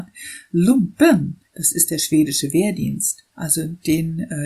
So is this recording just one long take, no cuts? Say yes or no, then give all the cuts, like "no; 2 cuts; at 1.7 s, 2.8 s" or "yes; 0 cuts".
no; 2 cuts; at 1.4 s, 3.3 s